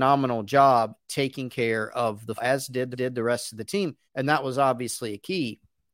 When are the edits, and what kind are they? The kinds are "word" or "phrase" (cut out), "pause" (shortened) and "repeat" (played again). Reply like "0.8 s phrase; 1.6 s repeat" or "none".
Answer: 2.4 s word; 2.9 s repeat; 4.1 s pause